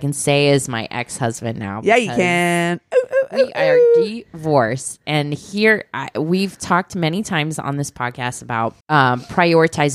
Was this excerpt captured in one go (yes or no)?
no